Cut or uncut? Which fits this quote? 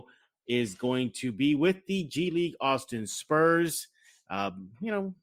uncut